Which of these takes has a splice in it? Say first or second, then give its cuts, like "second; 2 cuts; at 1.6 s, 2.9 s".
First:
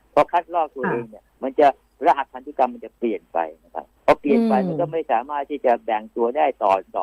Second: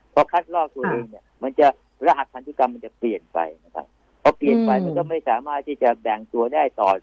first; 1 cut; at 4.0 s